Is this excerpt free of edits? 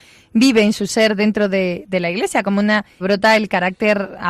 no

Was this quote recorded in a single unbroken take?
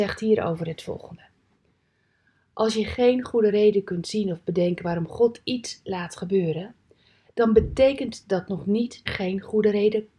no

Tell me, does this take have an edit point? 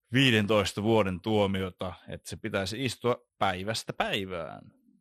yes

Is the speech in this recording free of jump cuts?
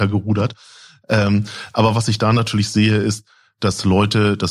yes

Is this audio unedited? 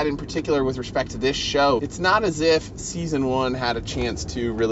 no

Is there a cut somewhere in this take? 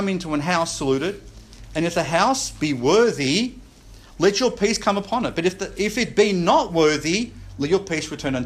no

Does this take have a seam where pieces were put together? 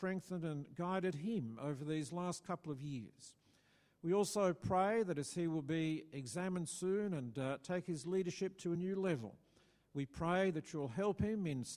no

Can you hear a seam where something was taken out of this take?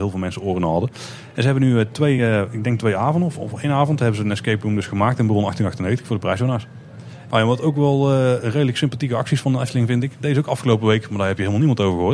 no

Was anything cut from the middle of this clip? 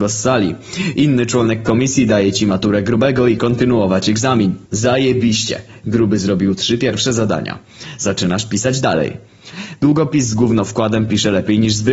yes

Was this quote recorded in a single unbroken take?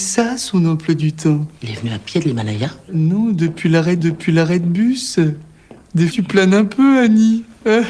no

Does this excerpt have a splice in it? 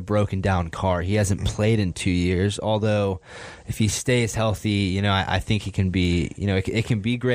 no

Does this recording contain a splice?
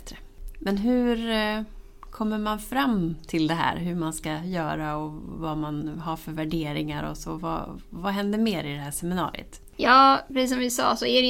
no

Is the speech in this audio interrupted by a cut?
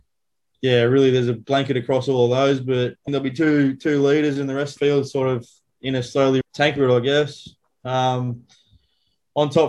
yes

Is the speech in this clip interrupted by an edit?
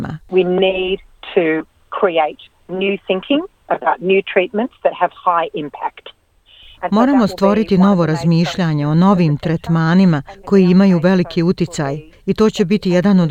no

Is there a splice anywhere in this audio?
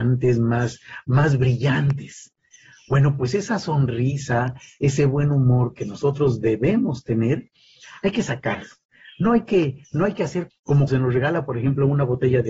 yes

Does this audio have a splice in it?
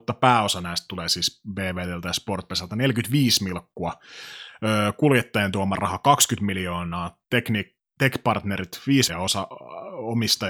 yes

